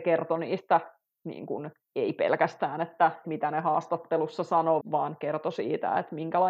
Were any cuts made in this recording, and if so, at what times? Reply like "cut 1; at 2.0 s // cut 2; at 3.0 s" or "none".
cut 1; at 3.2 s // cut 2; at 4.8 s